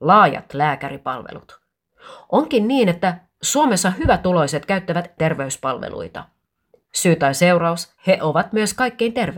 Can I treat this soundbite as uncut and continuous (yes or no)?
no